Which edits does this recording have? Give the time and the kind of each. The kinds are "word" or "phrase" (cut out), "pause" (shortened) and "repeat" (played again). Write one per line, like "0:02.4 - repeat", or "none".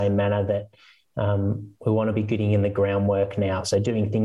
none